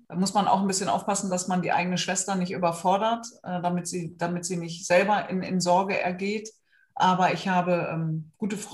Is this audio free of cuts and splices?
yes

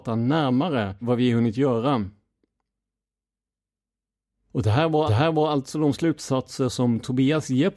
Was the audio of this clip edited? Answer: yes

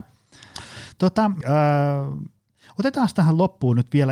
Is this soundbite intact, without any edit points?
no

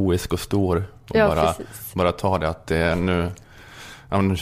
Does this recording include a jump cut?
no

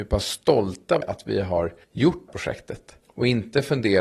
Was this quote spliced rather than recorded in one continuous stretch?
yes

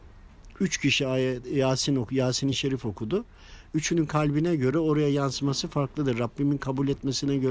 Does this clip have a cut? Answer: no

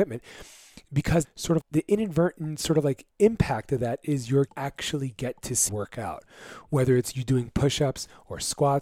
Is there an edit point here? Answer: yes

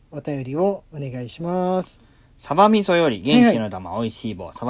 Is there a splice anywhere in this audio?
no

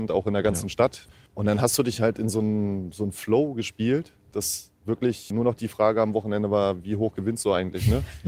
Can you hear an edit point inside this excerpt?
no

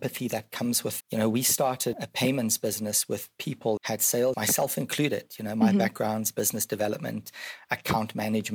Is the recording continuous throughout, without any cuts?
no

